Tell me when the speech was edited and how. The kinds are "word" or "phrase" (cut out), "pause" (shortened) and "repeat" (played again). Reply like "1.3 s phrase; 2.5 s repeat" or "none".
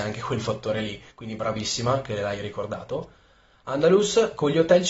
1.1 s pause